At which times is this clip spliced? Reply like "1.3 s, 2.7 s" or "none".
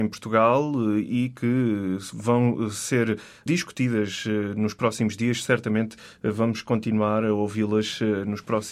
none